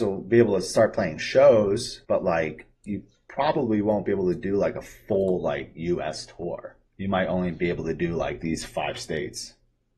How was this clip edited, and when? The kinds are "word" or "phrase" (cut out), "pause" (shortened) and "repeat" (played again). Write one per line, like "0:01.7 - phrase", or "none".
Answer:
0:02.0 - pause
0:02.7 - pause
0:06.9 - pause

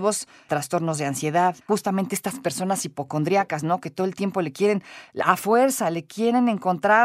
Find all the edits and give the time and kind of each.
0:01.6 - pause

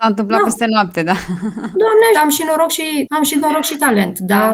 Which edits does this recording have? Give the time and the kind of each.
0:02.1 - word
0:03.1 - word

